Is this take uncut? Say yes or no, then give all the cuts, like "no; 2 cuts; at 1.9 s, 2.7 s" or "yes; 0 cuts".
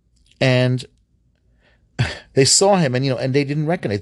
yes; 0 cuts